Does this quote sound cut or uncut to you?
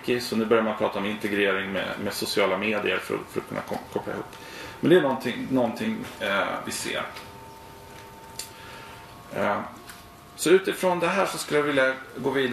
uncut